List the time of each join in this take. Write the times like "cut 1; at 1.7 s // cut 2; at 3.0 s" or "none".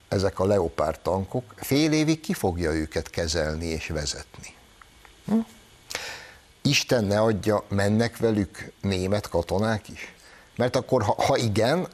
none